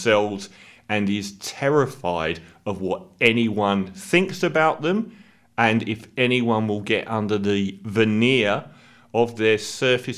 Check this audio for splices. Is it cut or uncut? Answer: uncut